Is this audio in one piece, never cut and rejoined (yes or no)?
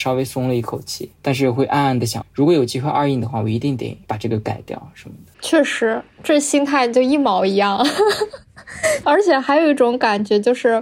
no